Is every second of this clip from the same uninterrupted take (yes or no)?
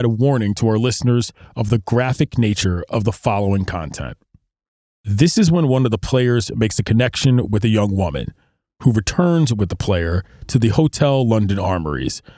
yes